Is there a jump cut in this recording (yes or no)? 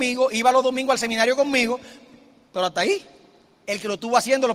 no